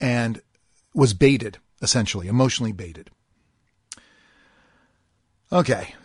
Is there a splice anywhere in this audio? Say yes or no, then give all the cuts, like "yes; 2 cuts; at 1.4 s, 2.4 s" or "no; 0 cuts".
no; 0 cuts